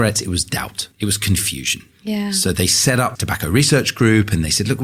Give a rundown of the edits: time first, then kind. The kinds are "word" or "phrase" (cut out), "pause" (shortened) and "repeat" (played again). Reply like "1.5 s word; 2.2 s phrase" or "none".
0.9 s pause; 3.2 s word